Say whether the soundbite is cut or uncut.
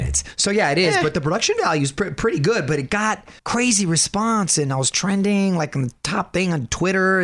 cut